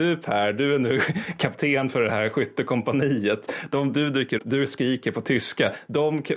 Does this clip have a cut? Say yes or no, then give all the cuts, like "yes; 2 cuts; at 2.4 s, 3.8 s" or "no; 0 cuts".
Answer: yes; 1 cut; at 4.4 s